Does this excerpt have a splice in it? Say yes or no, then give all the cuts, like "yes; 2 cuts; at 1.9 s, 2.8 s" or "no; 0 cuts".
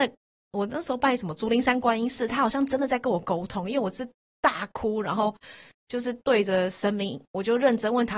no; 0 cuts